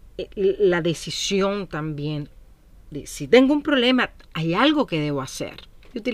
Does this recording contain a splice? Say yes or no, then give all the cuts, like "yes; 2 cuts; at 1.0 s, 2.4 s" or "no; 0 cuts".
no; 0 cuts